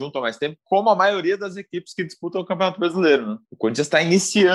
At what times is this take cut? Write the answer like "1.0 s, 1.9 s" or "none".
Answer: 3.4 s